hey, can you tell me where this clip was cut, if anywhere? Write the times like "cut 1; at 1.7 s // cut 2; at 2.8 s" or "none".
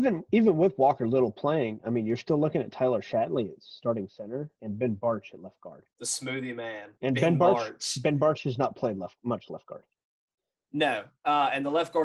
cut 1; at 4.5 s // cut 2; at 5.9 s // cut 3; at 7.0 s